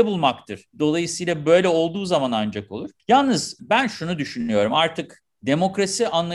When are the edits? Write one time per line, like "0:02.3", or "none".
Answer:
0:03.0